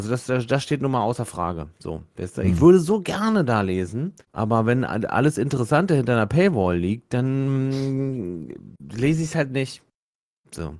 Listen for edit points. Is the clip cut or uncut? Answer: cut